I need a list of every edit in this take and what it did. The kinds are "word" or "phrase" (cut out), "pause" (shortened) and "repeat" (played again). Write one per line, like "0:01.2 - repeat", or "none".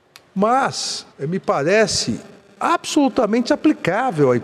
0:01.1 - pause
0:02.4 - pause